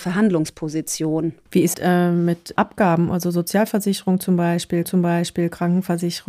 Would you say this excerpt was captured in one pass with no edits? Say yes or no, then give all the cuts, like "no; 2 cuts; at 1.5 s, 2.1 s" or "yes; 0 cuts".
no; 3 cuts; at 1.7 s, 2.6 s, 4.8 s